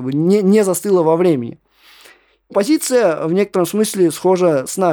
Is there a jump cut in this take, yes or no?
yes